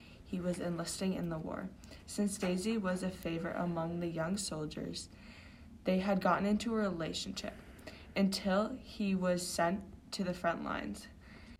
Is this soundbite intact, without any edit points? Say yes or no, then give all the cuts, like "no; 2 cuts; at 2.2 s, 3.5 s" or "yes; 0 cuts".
yes; 0 cuts